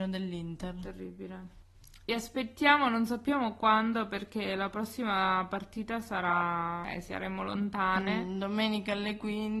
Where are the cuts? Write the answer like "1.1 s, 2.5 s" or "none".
2.0 s

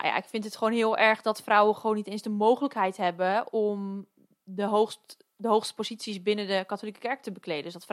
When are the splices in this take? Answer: none

